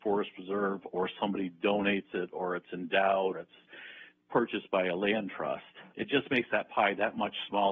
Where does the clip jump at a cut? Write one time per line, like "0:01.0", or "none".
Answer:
0:03.3
0:05.9